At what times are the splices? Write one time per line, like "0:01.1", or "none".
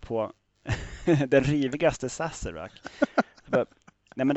none